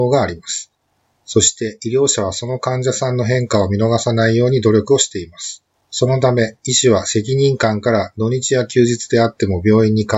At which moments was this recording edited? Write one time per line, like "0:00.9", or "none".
0:05.7